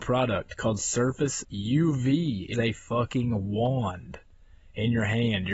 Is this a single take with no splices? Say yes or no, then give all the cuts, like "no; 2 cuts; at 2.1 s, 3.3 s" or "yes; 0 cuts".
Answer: no; 2 cuts; at 1.4 s, 2.5 s